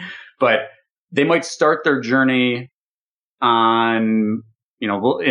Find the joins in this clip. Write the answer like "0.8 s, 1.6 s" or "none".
none